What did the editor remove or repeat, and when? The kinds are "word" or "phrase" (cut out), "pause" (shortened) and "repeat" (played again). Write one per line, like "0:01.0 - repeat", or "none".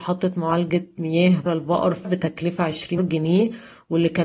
0:01.5 - word
0:02.0 - word
0:03.0 - word